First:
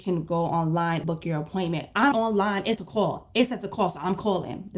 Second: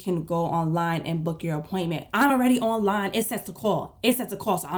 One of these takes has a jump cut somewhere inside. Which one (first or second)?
first